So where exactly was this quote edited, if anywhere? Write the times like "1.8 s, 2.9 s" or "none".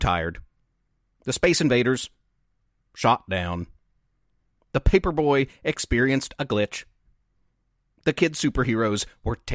none

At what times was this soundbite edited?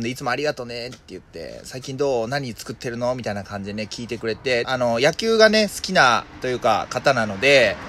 4.6 s

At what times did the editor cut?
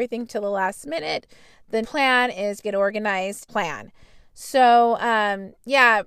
1.8 s, 2.6 s, 3.5 s

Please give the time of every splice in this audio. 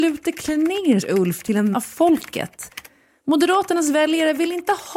1.0 s, 1.7 s

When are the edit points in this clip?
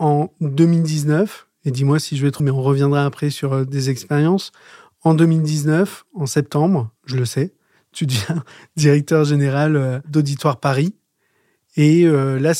2.4 s, 7.0 s

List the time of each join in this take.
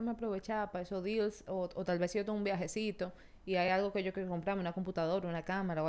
none

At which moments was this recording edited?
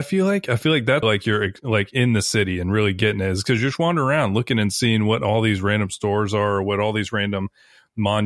1.0 s

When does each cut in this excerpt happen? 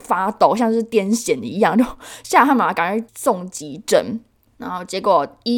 none

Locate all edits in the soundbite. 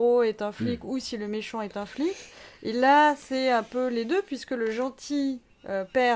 none

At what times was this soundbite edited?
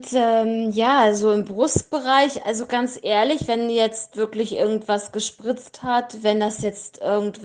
none

